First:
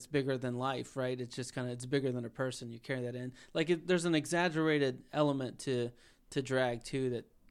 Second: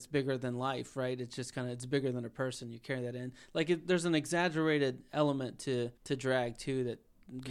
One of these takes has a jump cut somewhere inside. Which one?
second; 1 cut; at 6.0 s

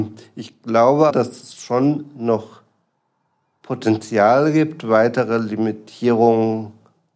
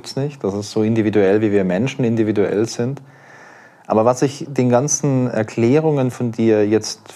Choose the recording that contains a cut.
first; 1 cut; at 1.1 s

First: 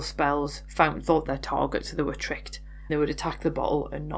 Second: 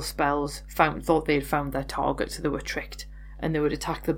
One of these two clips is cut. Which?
first; 2 cuts; at 1.3 s, 2.9 s

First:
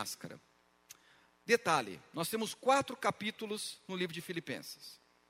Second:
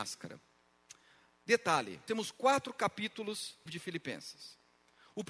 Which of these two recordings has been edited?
second; 2 cuts; at 2.1 s, 3.7 s

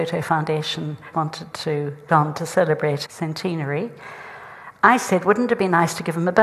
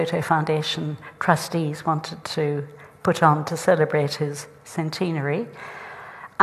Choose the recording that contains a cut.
first; 3 cuts; at 1.1 s, 2.1 s, 3.1 s

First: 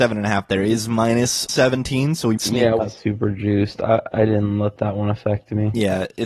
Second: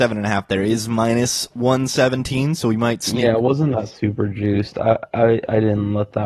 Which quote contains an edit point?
first; 4 cuts; at 1.5 s, 2.4 s, 2.8 s, 4.1 s

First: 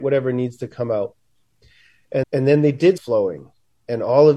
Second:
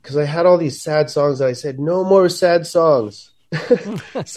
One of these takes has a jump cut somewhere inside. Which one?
first; 2 cuts; at 2.2 s, 3.0 s

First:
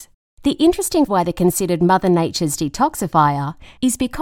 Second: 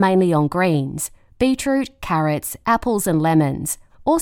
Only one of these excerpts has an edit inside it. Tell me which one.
first; 1 cut; at 1.1 s

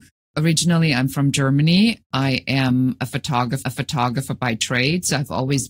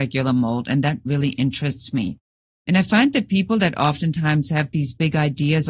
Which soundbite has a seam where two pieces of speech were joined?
first; 1 cut; at 3.6 s

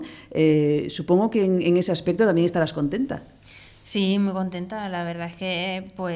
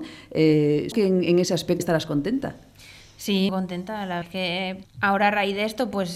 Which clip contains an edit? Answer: second; 5 cuts; at 0.9 s, 1.8 s, 3.5 s, 4.2 s, 4.8 s

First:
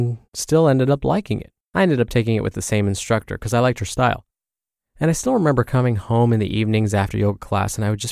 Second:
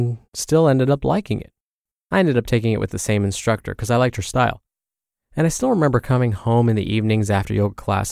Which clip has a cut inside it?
first; 1 cut; at 1.6 s

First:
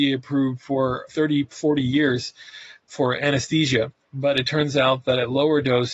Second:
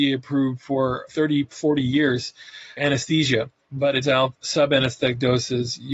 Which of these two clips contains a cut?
second; 3 cuts; at 2.8 s, 4.0 s, 4.3 s

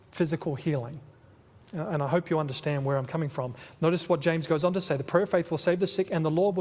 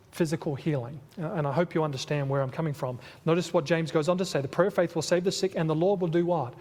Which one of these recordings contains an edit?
second; 1 cut; at 1.1 s

